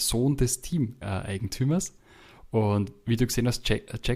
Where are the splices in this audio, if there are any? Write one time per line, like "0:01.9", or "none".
0:01.0